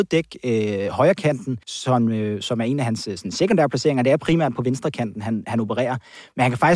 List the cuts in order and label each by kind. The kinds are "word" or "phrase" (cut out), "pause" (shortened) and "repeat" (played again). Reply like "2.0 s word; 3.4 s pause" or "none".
1.6 s pause